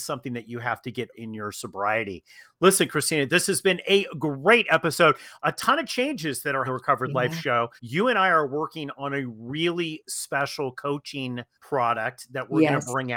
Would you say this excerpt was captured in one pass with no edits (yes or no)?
no